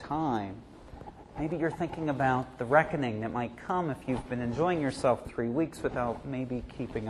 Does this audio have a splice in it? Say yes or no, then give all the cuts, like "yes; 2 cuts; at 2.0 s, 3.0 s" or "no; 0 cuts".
yes; 1 cut; at 5.2 s